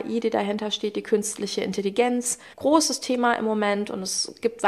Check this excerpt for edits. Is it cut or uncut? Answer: cut